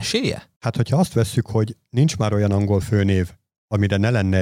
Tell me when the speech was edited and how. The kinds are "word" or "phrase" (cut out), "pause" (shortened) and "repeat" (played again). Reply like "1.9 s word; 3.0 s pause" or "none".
none